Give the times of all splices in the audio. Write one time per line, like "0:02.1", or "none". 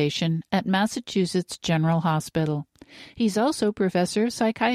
none